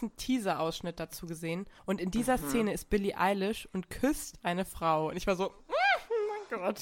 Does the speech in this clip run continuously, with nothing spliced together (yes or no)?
no